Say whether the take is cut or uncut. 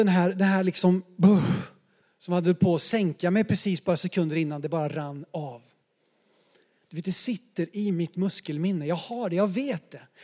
uncut